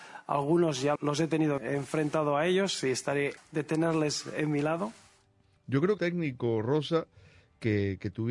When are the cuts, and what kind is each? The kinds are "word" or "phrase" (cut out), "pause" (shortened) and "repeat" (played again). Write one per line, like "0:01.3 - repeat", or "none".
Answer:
0:01.0 - word
0:01.6 - word
0:03.4 - word
0:06.0 - word